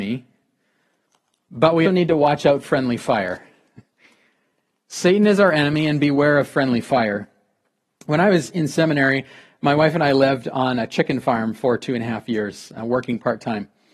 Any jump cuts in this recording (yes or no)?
yes